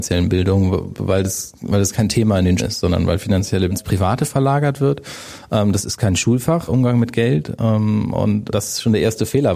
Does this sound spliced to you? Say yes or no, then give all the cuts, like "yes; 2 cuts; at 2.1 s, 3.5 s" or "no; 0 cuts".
yes; 4 cuts; at 2.6 s, 3.7 s, 6.7 s, 8.5 s